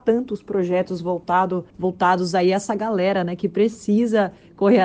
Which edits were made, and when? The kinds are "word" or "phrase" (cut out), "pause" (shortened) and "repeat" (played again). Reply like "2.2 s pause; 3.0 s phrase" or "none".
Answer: 1.7 s pause